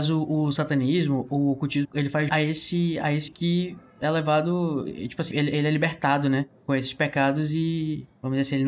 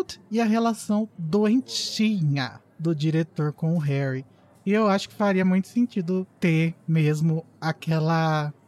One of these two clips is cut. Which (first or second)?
first